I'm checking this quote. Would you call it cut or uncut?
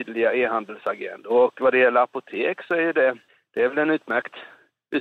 cut